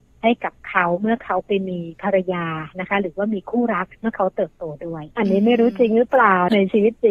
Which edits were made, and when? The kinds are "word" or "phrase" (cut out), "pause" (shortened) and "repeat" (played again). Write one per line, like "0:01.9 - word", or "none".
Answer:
0:03.9 - pause
0:05.1 - pause